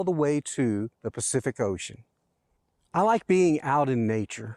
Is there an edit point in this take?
yes; 1 cut; at 0.9 s

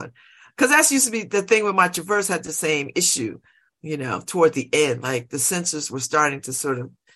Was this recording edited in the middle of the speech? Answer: no; 0 cuts

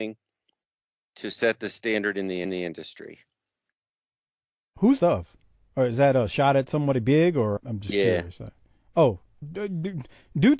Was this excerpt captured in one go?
no; 4 cuts; at 2.4 s, 5.0 s, 7.6 s, 9.4 s

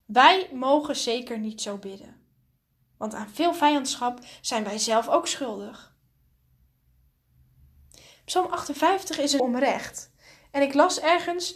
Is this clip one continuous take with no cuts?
no; 1 cut; at 9.4 s

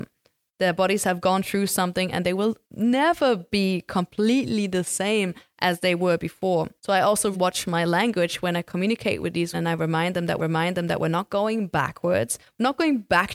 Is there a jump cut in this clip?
yes; 5 cuts; at 2.6 s, 6.8 s, 7.3 s, 9.5 s, 10.4 s

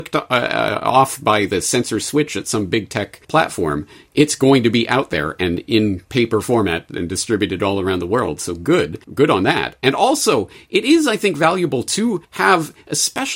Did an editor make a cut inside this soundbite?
yes; 3 cuts; at 3.2 s, 9.0 s, 12.2 s

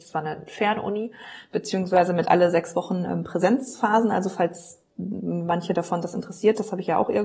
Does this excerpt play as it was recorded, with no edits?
yes; 0 cuts

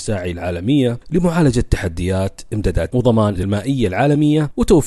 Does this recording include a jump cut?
yes; 2 cuts; at 2.9 s, 3.4 s

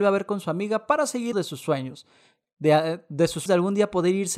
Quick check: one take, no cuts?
no; 2 cuts; at 1.3 s, 3.5 s

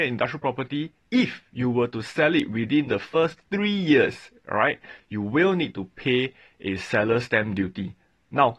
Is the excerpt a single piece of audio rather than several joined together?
yes; 0 cuts

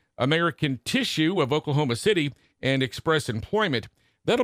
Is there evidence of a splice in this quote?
no; 0 cuts

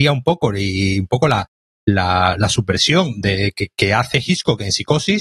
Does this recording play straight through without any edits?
yes; 0 cuts

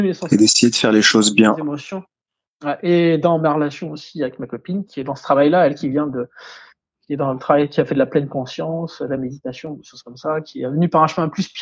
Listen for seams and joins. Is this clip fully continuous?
yes; 0 cuts

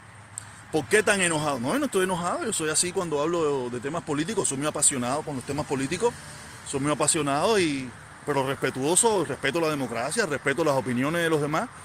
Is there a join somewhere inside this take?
no; 0 cuts

